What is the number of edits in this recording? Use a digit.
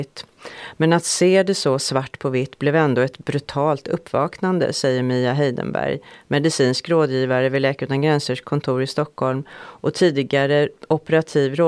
1